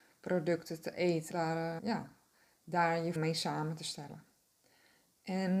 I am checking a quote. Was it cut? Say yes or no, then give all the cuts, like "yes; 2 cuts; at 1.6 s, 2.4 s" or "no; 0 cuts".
yes; 3 cuts; at 1.3 s, 1.8 s, 3.2 s